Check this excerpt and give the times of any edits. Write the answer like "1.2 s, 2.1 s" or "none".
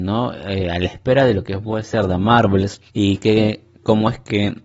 2.9 s